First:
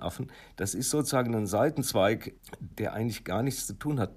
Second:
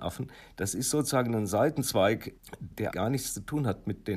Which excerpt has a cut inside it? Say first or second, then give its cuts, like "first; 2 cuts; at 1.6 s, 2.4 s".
second; 1 cut; at 2.9 s